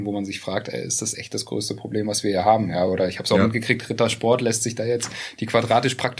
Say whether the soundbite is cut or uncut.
uncut